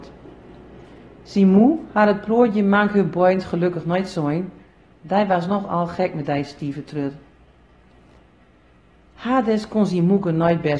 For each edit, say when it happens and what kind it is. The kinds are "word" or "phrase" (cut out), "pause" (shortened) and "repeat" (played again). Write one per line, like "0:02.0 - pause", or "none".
none